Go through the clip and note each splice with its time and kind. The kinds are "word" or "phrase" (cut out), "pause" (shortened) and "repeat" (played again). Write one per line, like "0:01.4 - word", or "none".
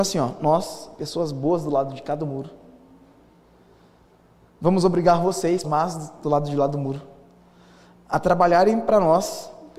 0:05.6 - word